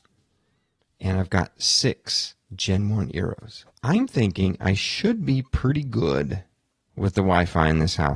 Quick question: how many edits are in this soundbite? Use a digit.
3